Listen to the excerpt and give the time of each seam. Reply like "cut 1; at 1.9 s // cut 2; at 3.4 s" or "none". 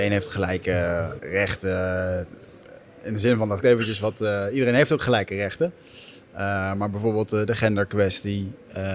cut 1; at 1.2 s // cut 2; at 3.6 s